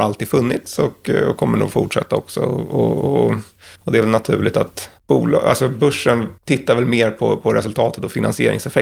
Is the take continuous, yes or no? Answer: no